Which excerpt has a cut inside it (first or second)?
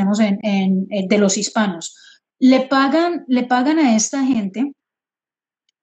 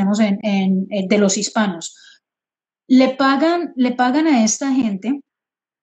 first